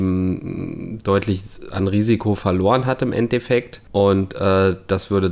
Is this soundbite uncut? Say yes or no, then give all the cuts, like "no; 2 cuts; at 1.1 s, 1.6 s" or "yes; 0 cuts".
yes; 0 cuts